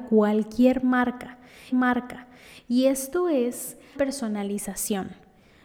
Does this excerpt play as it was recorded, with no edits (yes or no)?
no